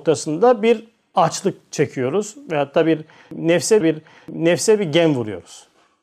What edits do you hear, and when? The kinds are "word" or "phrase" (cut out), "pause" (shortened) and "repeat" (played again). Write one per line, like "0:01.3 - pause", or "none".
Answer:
0:03.8 - repeat